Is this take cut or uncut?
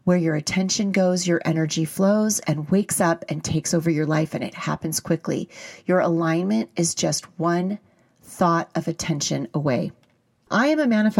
uncut